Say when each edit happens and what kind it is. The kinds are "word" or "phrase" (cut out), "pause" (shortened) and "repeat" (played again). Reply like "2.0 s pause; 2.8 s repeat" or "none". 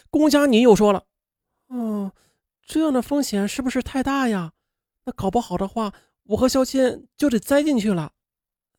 none